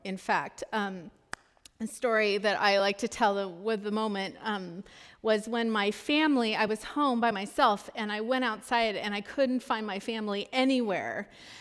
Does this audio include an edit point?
no; 0 cuts

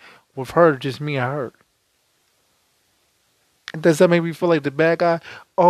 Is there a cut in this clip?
no; 0 cuts

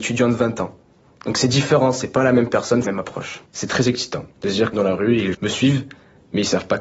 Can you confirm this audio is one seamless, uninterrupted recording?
no; 5 cuts; at 2.8 s, 3.5 s, 4.3 s, 4.7 s, 5.3 s

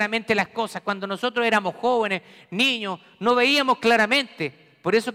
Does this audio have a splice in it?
no; 0 cuts

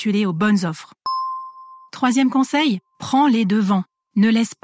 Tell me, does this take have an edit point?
no; 0 cuts

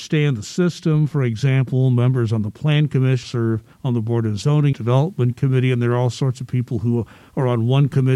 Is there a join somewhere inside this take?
yes; 3 cuts; at 3.2 s, 3.7 s, 4.7 s

